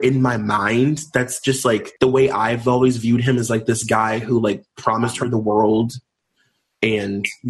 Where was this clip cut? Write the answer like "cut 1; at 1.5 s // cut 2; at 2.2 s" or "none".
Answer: cut 1; at 2.0 s